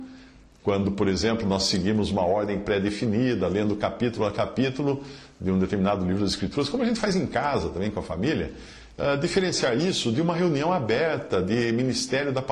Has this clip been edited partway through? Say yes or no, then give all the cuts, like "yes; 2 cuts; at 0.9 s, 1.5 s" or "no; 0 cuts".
no; 0 cuts